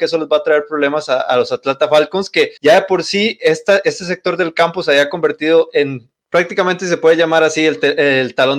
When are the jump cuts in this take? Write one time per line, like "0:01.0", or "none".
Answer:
0:02.6
0:06.2